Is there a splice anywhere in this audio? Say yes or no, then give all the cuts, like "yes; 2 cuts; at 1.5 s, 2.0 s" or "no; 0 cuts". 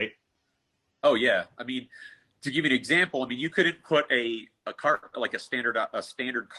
no; 0 cuts